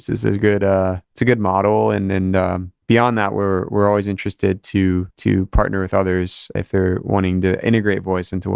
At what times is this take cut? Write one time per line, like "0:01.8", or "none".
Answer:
0:01.0
0:02.8
0:05.1
0:06.6